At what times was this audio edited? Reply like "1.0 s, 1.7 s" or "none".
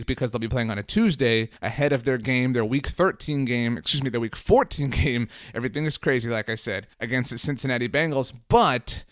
1.6 s, 6.9 s